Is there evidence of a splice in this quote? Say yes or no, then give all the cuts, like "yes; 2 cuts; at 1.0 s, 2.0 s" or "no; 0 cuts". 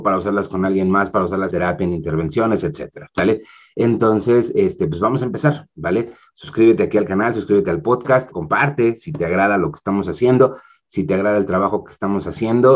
yes; 2 cuts; at 1.5 s, 8.3 s